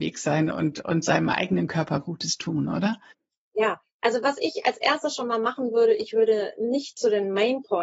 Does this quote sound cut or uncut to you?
cut